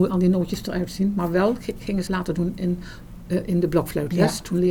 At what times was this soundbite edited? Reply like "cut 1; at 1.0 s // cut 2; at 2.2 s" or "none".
cut 1; at 2.1 s